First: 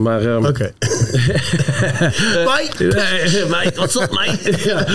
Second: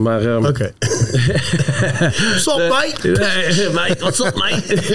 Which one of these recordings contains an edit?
first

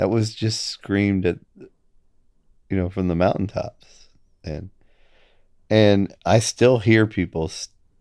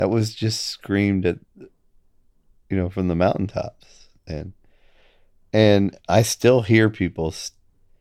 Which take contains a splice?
second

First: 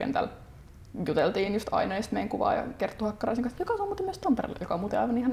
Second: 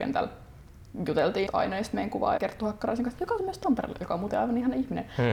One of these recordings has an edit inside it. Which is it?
second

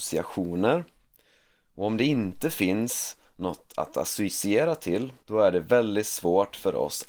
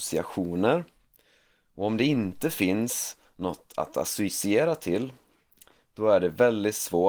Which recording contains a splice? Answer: first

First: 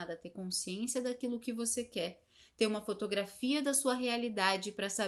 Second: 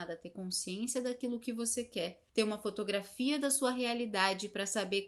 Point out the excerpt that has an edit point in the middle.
second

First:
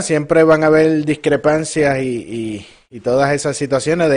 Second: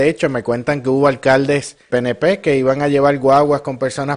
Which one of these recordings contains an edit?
second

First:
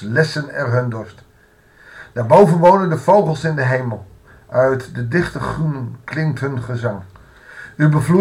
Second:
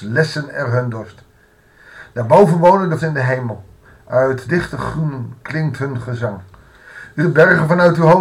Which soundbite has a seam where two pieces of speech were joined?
second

